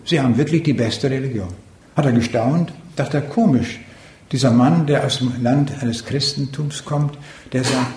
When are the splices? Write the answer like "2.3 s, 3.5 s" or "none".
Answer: none